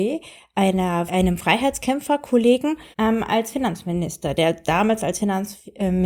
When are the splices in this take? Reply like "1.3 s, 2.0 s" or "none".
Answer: 1.1 s, 2.9 s